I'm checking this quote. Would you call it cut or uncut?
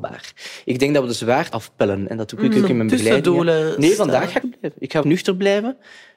cut